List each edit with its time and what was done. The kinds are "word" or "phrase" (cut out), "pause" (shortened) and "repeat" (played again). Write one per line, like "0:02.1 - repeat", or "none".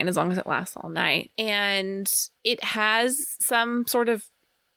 0:02.4 - pause